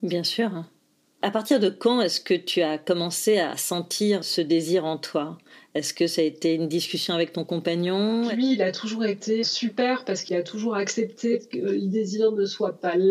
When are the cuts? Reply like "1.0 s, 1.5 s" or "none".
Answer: 9.4 s